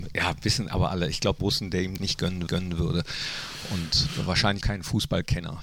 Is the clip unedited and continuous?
no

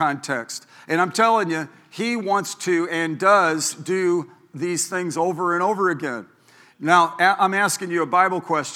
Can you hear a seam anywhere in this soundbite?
no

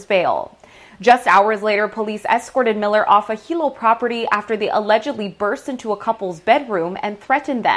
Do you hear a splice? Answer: no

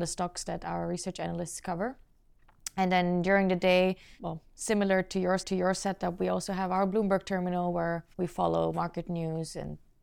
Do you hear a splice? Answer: yes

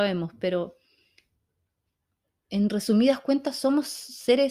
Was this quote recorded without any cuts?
yes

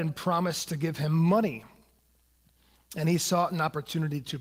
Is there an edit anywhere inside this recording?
no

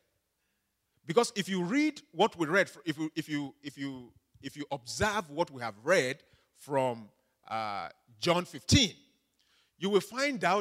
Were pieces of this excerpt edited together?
no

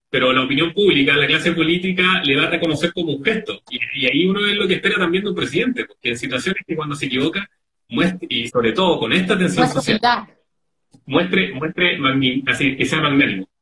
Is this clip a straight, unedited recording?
yes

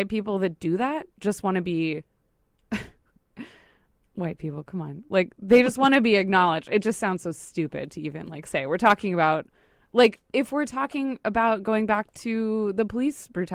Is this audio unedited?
yes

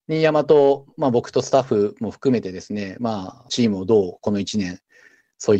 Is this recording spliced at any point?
no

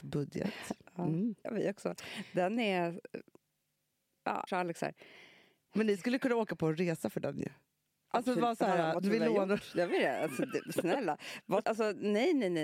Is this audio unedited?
no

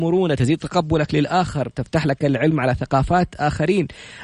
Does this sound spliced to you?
no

